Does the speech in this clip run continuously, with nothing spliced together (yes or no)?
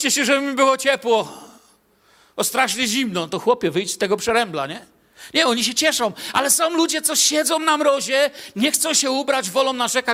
yes